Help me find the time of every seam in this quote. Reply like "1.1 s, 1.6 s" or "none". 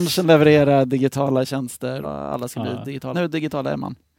2.0 s, 3.1 s